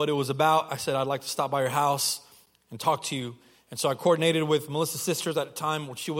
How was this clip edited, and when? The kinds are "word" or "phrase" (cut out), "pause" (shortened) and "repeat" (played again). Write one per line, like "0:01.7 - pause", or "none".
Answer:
none